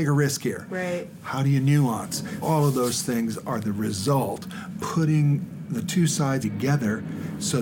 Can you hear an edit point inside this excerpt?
yes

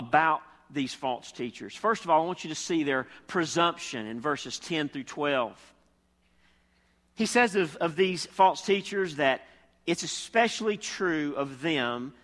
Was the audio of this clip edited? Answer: no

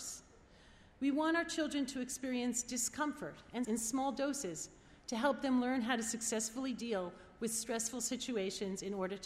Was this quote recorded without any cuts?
no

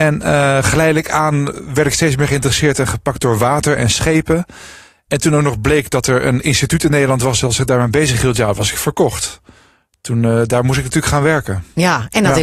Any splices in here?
no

